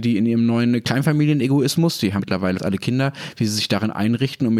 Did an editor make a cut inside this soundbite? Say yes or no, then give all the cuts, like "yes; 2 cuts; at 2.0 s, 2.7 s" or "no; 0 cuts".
yes; 2 cuts; at 2.2 s, 2.6 s